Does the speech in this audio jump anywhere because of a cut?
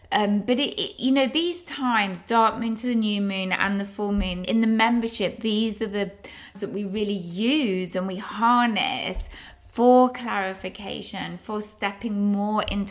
yes; 2 cuts; at 4.4 s, 6.5 s

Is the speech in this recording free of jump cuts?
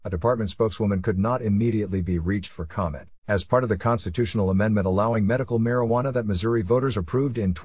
no; 1 cut; at 3.2 s

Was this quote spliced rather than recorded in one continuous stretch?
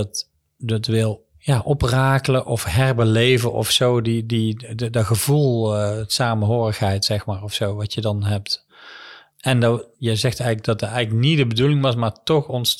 yes; 1 cut; at 9.9 s

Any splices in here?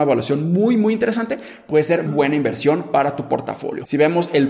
yes; 1 cut; at 2.1 s

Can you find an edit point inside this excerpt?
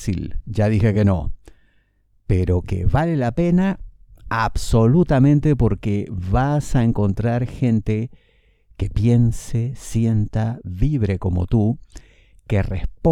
no; 0 cuts

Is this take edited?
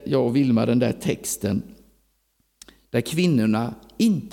no; 0 cuts

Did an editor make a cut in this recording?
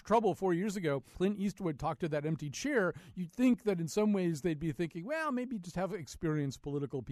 yes; 1 cut; at 1.1 s

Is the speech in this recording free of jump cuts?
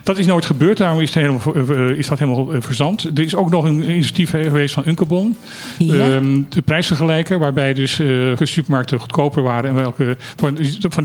no; 1 cut; at 8.4 s

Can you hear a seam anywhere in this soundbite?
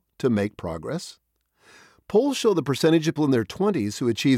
yes; 1 cut; at 3.2 s

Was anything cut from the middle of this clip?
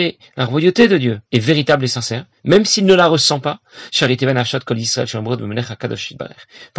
yes; 1 cut; at 1.3 s

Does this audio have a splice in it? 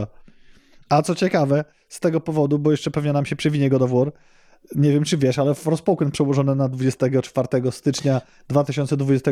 no; 0 cuts

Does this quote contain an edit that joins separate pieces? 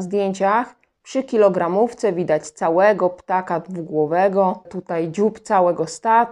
no; 0 cuts

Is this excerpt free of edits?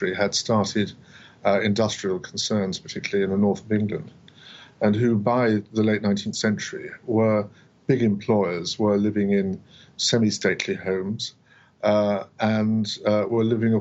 yes; 0 cuts

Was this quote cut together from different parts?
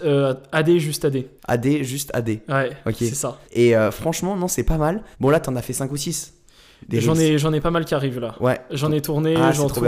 yes; 3 cuts; at 1.4 s, 3.4 s, 5.1 s

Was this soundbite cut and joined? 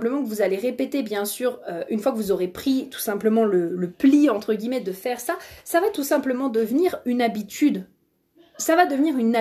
no; 0 cuts

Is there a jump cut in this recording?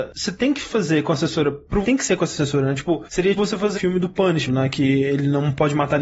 yes; 4 cuts; at 1.8 s, 3.4 s, 3.7 s, 4.5 s

